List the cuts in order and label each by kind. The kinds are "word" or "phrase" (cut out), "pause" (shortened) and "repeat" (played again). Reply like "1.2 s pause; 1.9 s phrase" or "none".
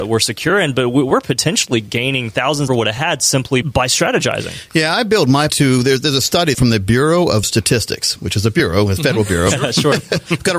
2.7 s phrase; 3.6 s word; 5.5 s phrase; 6.5 s phrase; 7.4 s word